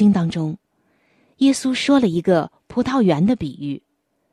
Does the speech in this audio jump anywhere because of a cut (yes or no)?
no